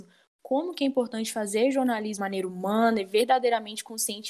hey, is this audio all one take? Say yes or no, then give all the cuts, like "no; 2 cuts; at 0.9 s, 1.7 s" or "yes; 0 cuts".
no; 1 cut; at 2.2 s